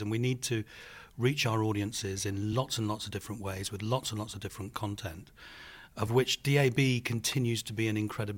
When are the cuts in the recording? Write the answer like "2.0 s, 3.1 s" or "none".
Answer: none